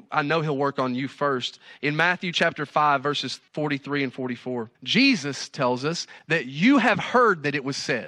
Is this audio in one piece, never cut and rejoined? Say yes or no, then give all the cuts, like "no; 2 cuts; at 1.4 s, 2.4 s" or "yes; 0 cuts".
no; 2 cuts; at 3.5 s, 4.7 s